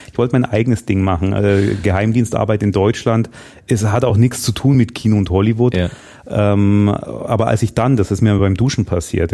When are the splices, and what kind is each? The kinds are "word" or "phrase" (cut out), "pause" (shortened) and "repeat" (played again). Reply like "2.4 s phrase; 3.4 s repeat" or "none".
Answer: none

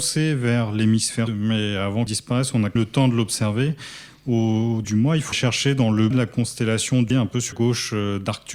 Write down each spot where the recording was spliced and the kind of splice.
1.3 s word; 2.1 s word; 2.8 s word; 4.8 s word; 5.3 s word; 6.1 s word; 7.1 s word; 7.5 s word

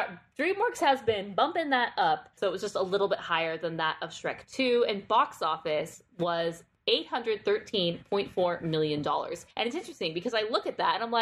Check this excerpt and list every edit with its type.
9.5 s pause

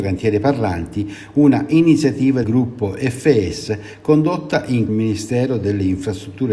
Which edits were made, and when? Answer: 2.4 s word; 4.9 s phrase

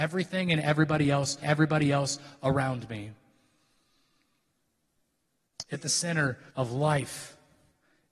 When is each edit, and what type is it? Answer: 1.4 s repeat; 5.7 s word; 6.5 s pause

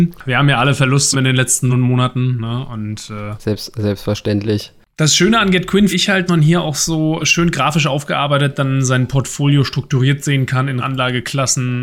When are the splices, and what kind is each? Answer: 1.1 s word; 1.7 s word; 5.9 s word; 6.3 s word; 7.2 s word; 10.8 s word

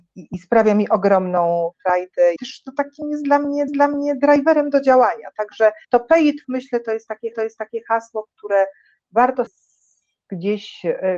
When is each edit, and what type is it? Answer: 2.4 s word; 3.7 s repeat; 5.8 s pause; 6.4 s word; 7.3 s repeat; 9.5 s word

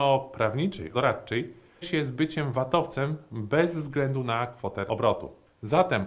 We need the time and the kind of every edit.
0.9 s word; 1.8 s word; 4.9 s word

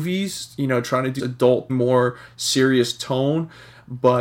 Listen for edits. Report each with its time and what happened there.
1.2 s word; 1.7 s word

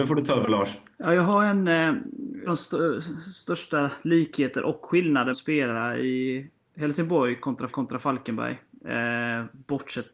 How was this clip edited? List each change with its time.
2.5 s phrase; 5.3 s word; 7.7 s repeat

